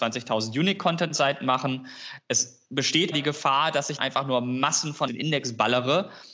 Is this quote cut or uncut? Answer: cut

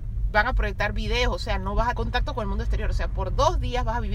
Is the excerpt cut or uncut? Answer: cut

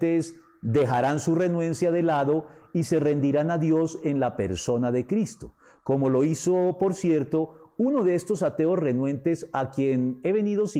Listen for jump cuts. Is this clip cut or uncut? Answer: uncut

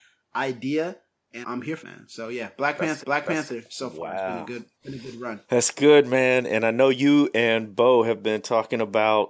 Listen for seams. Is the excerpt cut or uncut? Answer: cut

